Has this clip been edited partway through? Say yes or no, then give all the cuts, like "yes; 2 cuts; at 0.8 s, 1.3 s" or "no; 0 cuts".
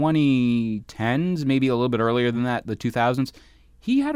no; 0 cuts